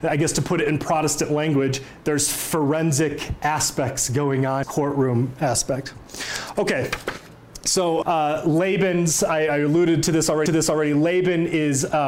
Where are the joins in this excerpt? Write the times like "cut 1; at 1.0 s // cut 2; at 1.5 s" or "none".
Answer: cut 1; at 4.6 s // cut 2; at 8.0 s // cut 3; at 10.5 s